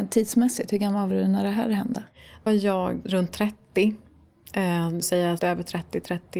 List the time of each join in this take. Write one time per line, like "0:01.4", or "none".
0:01.1
0:02.5
0:03.0
0:05.0
0:05.4

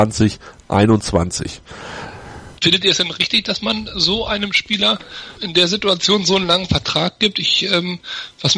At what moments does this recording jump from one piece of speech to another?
0:02.6
0:05.3

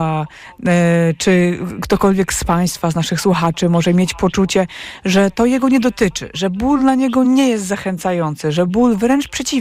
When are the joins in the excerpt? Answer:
none

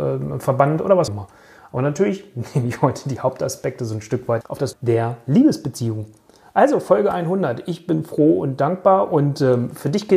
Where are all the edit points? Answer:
0:01.1
0:04.4
0:04.7

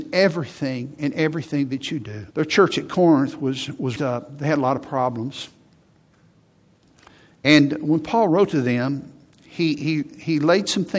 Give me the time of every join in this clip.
0:02.3
0:04.0

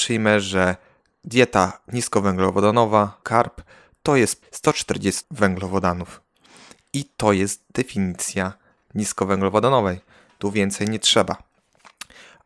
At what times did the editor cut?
0:03.2
0:04.4
0:05.2
0:08.8

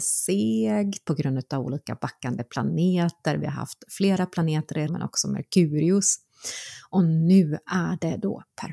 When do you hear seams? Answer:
0:01.1
0:04.9

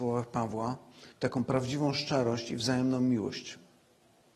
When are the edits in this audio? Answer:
0:01.1

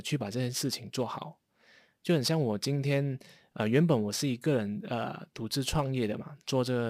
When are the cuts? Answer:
none

